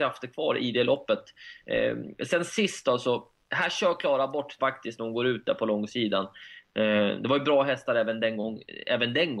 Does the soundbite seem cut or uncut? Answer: cut